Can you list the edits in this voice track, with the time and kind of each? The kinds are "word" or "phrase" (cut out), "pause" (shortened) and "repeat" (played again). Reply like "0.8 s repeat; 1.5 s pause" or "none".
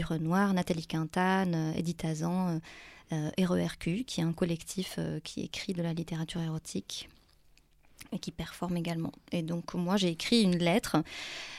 none